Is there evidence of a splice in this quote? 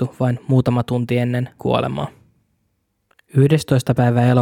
yes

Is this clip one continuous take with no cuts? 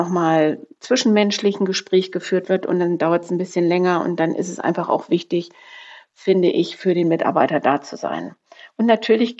yes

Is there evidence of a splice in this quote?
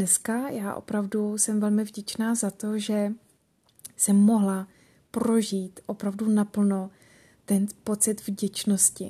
no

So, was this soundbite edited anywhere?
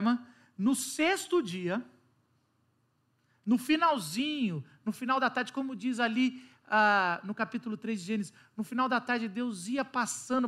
no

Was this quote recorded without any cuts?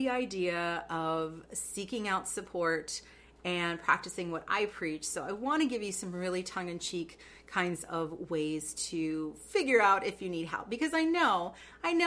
yes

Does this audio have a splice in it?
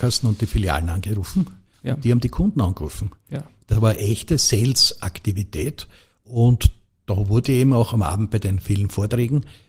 no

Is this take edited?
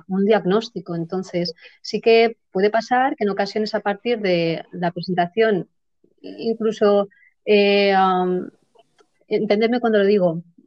no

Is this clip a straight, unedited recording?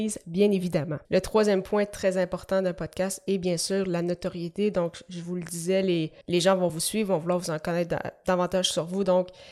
no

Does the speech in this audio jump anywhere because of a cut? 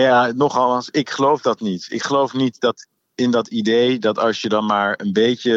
no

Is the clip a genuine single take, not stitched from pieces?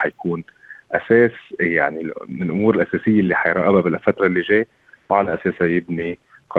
yes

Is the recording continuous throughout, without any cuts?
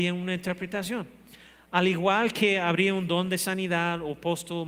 yes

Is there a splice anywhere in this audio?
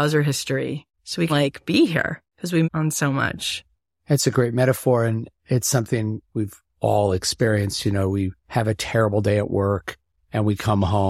yes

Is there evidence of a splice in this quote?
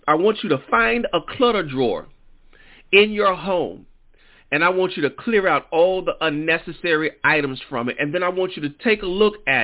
no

